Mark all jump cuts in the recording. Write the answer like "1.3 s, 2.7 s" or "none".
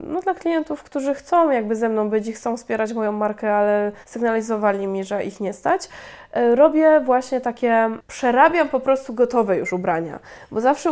4.0 s

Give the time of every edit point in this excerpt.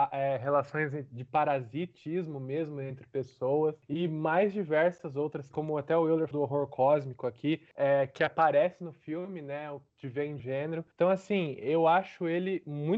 5.5 s, 6.3 s, 9.9 s, 10.4 s, 10.9 s

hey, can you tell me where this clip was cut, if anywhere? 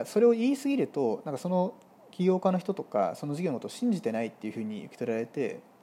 none

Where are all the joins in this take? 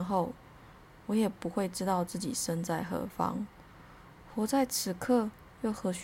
none

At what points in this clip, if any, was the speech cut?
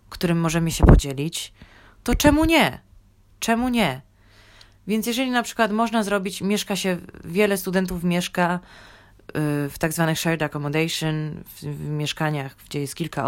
none

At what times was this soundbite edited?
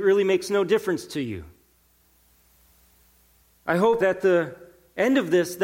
4.0 s

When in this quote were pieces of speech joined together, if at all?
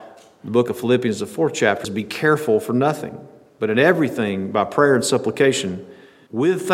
1.8 s

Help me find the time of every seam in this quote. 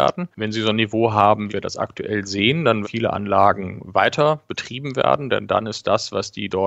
1.5 s, 2.8 s

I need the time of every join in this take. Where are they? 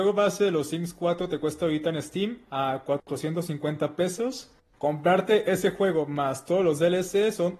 none

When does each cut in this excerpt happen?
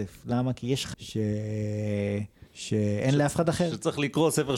0.9 s

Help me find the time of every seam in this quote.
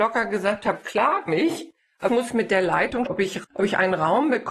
1.3 s, 2.1 s, 3.1 s, 3.4 s

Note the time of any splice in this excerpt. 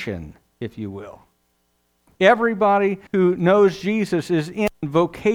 3.1 s

